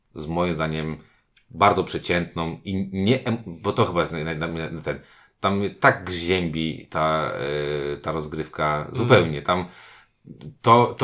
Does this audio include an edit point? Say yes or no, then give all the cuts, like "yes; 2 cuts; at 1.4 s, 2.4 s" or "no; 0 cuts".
no; 0 cuts